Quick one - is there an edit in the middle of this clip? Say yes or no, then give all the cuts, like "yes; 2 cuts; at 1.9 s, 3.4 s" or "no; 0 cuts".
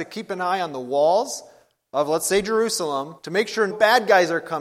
yes; 2 cuts; at 3.2 s, 3.7 s